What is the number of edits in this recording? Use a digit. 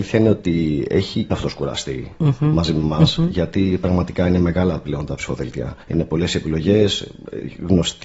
2